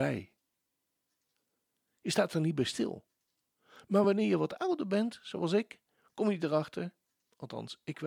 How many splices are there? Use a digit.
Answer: 0